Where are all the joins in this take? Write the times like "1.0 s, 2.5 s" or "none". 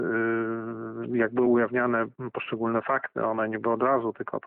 none